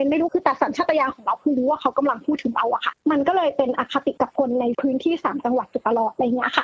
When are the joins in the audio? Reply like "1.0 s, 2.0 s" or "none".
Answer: 3.0 s